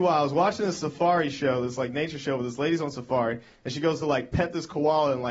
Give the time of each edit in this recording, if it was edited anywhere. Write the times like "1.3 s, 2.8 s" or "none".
none